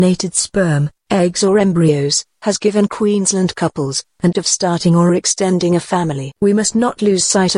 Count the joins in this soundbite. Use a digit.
2